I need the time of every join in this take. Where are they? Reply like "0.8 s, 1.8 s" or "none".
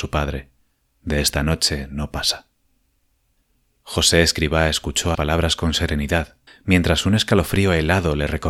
5.1 s, 6.5 s